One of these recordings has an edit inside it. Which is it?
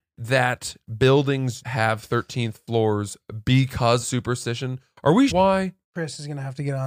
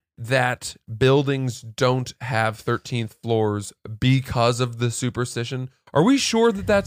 first; 4 cuts; at 1.6 s, 4.0 s, 5.3 s, 5.8 s

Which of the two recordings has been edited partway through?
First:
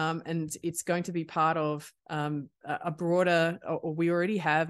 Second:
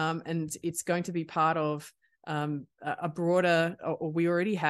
first; 1 cut; at 2.0 s

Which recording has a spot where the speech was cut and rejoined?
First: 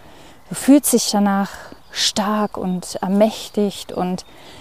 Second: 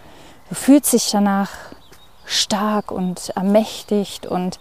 first; 1 cut; at 1.8 s

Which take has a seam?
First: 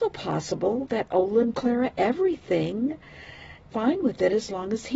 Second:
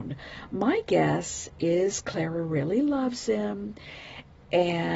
first; 2 cuts; at 1.5 s, 3.7 s

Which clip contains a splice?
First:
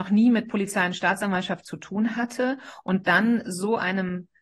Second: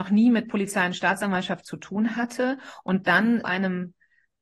second; 1 cut; at 3.4 s

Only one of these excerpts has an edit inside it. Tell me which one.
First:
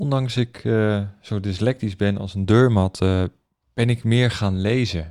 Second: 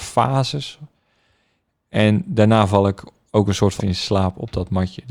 second; 1 cut; at 3.8 s

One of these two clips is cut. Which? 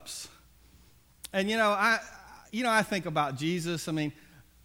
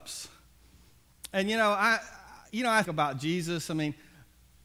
second; 1 cut; at 2.8 s

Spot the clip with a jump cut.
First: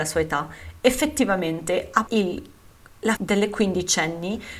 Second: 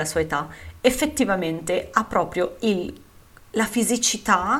first; 2 cuts; at 2.1 s, 3.2 s

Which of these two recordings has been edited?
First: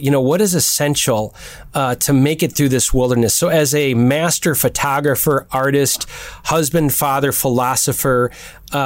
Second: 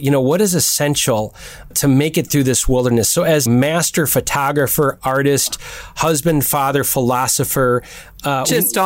second; 2 cuts; at 1.7 s, 3.5 s

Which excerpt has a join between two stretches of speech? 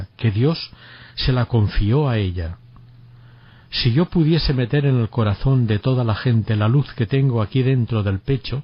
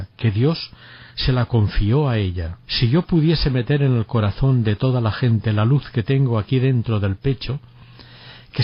second; 1 cut; at 2.6 s

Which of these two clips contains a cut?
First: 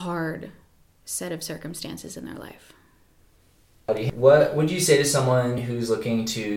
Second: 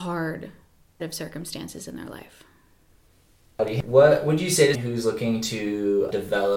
second; 2 cuts; at 1.0 s, 4.7 s

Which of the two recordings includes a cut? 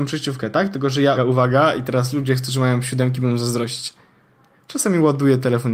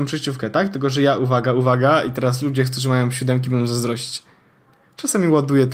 first; 1 cut; at 1.2 s

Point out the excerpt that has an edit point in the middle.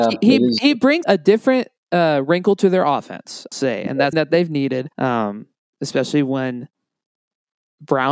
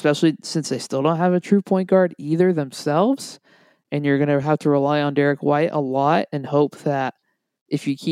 first; 5 cuts; at 1.0 s, 1.8 s, 3.5 s, 4.1 s, 4.9 s

